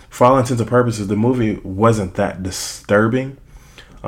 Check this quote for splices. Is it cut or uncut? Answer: uncut